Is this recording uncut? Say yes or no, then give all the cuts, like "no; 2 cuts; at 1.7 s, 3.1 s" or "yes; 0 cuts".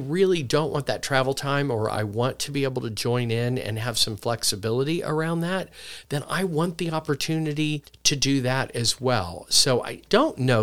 yes; 0 cuts